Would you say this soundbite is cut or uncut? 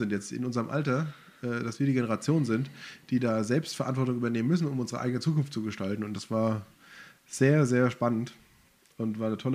uncut